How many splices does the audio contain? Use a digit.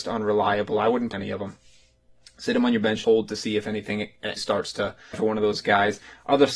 4